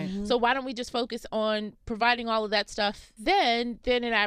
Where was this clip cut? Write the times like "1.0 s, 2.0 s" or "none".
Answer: none